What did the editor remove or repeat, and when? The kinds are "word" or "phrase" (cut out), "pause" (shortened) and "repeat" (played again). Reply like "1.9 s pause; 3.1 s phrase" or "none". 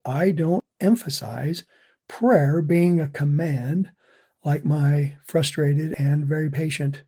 none